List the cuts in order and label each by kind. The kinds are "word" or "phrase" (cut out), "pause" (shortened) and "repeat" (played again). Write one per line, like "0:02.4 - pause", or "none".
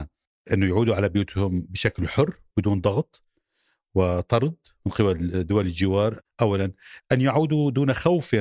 0:02.5 - word
0:07.0 - word